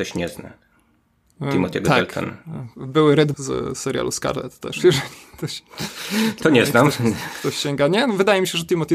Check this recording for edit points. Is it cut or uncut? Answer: cut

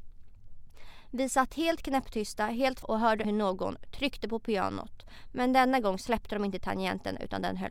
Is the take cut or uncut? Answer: cut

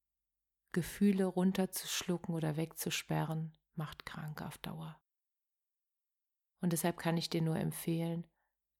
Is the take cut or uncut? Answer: uncut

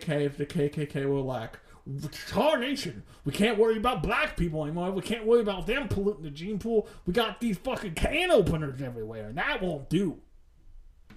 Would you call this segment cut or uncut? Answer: uncut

